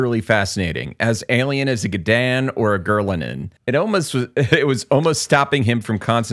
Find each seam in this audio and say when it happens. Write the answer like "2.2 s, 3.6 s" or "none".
3.6 s